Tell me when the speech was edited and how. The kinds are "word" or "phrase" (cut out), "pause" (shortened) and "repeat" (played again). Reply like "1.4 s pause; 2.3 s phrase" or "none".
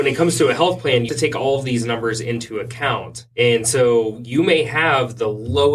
1.1 s word; 3.3 s pause